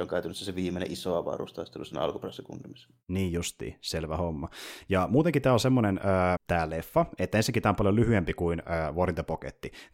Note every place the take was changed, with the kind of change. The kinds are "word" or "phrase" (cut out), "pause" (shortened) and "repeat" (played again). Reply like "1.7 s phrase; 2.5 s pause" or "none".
6.4 s word